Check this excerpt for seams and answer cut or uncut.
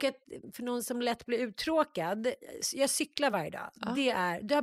uncut